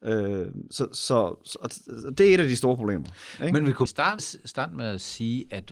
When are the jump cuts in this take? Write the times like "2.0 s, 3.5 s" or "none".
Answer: 3.9 s, 4.2 s

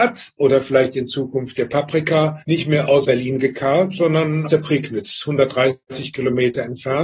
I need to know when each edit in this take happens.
2.4 s, 3.0 s, 4.5 s

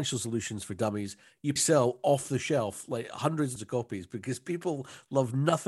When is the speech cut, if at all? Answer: 1.6 s, 3.6 s

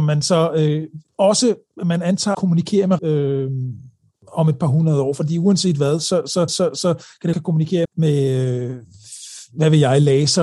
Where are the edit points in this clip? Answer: 1.1 s, 2.3 s, 3.0 s, 6.5 s, 7.3 s, 7.8 s

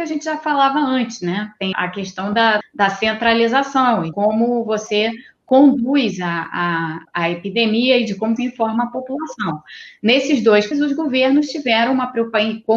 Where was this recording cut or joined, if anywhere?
1.7 s, 2.6 s, 4.1 s, 7.0 s, 8.4 s, 10.7 s

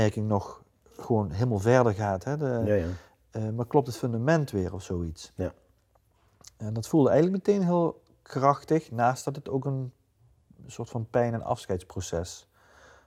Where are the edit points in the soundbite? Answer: none

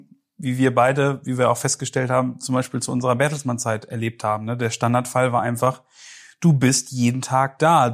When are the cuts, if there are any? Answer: none

